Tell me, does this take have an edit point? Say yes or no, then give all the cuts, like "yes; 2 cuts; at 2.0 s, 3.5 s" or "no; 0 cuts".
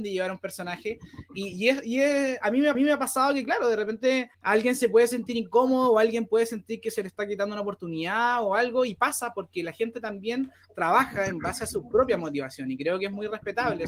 yes; 2 cuts; at 2.7 s, 4.3 s